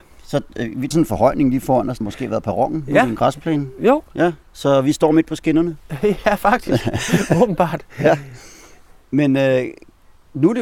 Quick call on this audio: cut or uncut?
cut